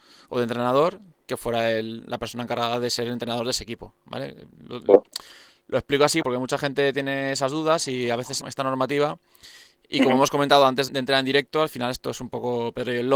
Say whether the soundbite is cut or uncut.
cut